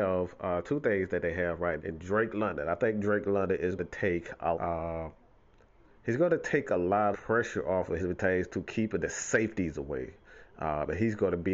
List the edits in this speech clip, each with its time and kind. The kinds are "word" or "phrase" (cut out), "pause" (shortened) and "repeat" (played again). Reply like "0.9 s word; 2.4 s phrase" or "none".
1.8 s word; 3.8 s word; 4.5 s phrase; 7.1 s word; 8.0 s phrase